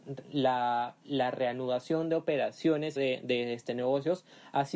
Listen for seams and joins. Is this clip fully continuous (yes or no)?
no